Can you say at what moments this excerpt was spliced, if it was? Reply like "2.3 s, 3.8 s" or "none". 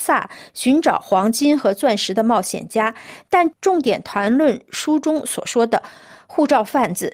none